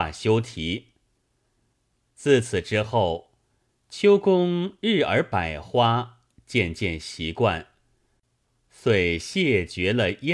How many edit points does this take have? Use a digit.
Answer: 0